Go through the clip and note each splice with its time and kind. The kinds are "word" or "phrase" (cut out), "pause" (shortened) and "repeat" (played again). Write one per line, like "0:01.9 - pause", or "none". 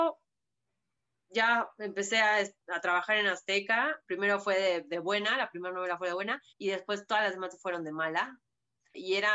0:04.0 - pause
0:06.5 - pause